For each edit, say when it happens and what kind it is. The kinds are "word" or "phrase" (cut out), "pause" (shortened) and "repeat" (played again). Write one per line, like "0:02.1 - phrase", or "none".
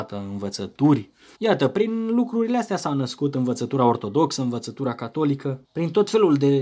0:01.4 - pause
0:05.6 - pause